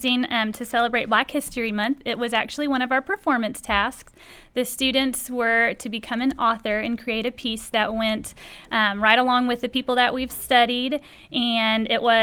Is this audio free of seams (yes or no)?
yes